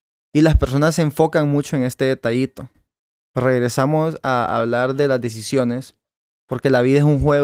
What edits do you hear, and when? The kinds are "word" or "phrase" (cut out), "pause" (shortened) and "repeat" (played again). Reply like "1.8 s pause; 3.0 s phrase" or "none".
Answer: none